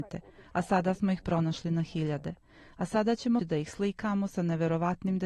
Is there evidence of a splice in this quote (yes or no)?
yes